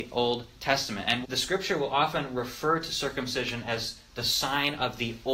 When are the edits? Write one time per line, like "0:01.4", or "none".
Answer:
0:01.2